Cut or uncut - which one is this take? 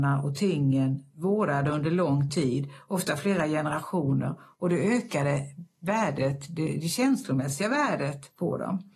uncut